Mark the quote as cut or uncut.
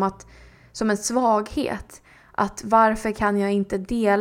uncut